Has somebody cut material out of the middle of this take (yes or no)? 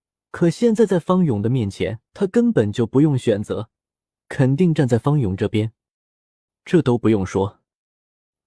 yes